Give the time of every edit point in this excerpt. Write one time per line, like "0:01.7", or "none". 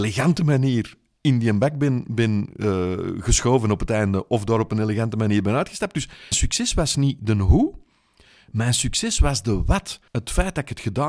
0:06.3
0:10.1